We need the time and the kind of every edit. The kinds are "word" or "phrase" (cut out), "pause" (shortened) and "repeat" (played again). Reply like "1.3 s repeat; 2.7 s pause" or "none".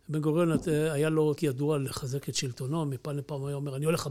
1.4 s word

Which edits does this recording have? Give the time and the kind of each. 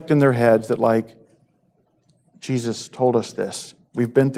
none

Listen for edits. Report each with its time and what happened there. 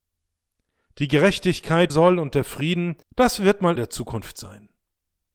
1.9 s phrase; 3.0 s pause; 3.8 s phrase

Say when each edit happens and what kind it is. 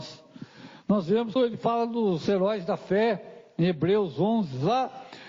1.4 s word

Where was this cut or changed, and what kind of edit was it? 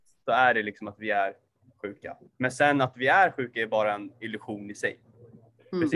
2.3 s pause

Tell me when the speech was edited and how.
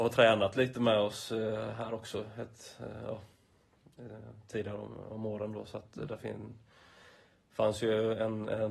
none

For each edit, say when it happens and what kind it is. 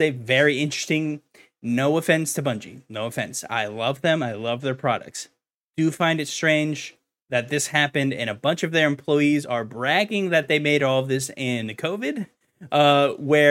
none

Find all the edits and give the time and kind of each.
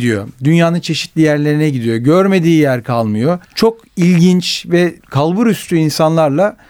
3.4 s pause; 5.0 s pause

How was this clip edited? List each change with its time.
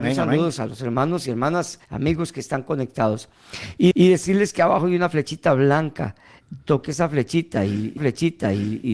1.8 s pause; 3.9 s repeat; 8.0 s repeat

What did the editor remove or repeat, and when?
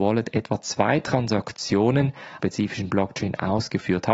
2.4 s phrase

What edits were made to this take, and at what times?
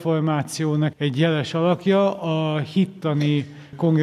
0.9 s word

